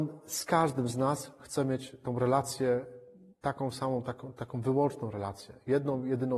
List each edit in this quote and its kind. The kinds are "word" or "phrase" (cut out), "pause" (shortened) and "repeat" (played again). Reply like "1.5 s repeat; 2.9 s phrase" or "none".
none